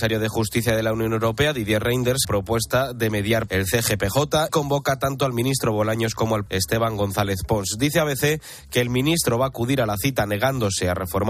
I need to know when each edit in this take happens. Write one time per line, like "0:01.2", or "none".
0:02.2
0:03.5
0:04.5
0:06.5